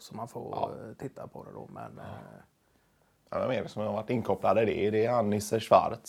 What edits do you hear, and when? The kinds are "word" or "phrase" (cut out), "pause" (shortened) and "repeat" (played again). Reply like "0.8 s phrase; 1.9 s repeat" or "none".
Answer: none